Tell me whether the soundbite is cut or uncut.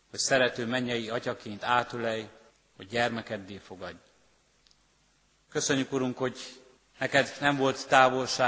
cut